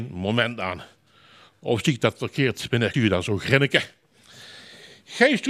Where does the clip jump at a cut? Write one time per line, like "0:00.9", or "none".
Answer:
0:02.9

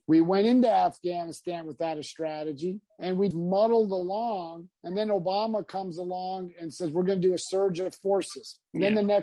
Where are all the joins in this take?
0:03.3

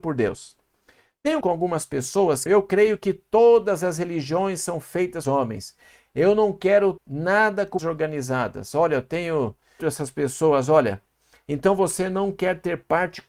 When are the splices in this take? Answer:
0:01.4
0:02.5
0:05.2
0:07.0
0:07.8
0:09.8

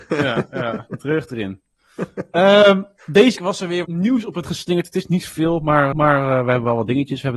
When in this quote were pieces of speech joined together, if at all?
0:03.4
0:03.8
0:04.4
0:05.9

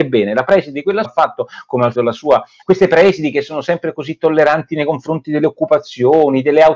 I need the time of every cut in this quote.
0:01.0
0:01.9
0:02.6

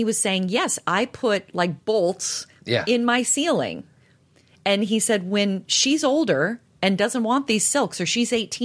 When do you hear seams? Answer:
none

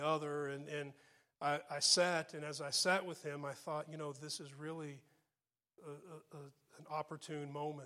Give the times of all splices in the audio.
none

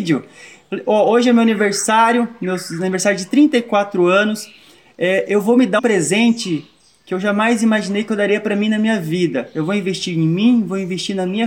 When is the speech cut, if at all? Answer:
0:05.8

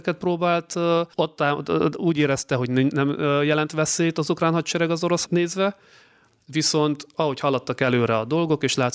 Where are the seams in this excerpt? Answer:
0:01.1
0:05.2

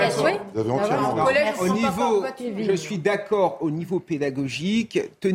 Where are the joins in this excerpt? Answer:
none

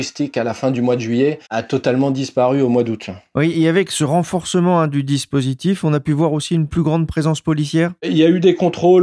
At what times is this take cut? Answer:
0:01.5

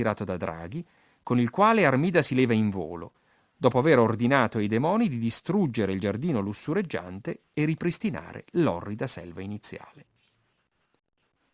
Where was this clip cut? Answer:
none

